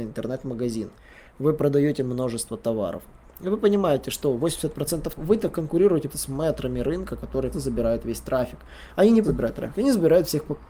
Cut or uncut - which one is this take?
cut